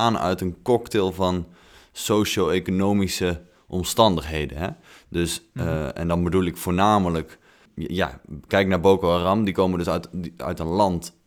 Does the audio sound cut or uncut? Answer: uncut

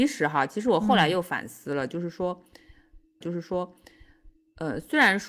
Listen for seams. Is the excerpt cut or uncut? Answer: cut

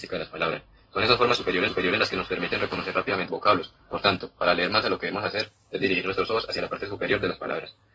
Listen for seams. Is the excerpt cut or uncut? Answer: cut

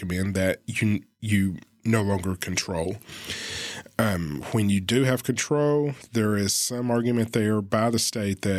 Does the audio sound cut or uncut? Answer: uncut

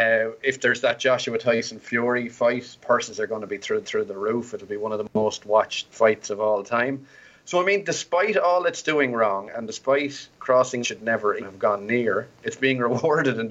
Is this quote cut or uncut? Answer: cut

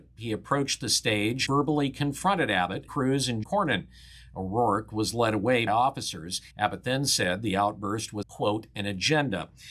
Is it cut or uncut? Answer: cut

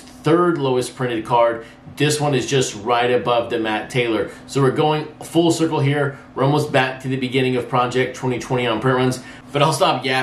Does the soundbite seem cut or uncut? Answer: uncut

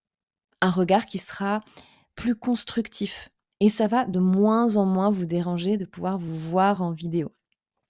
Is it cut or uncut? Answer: uncut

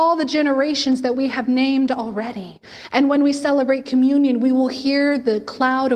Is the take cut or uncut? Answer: uncut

